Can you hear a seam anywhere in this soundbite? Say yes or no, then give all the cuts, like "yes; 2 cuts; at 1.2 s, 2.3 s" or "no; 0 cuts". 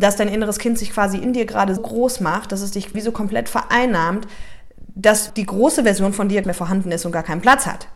yes; 4 cuts; at 1.8 s, 2.9 s, 5.3 s, 6.4 s